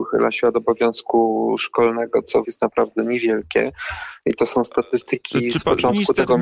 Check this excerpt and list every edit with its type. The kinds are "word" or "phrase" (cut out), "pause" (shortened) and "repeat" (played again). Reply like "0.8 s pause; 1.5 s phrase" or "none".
2.4 s phrase